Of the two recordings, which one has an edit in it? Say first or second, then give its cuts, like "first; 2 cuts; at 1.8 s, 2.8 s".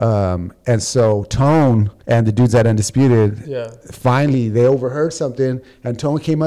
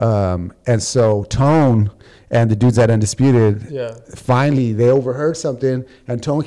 first; 1 cut; at 2.0 s